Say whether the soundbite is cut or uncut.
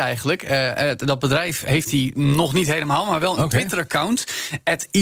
uncut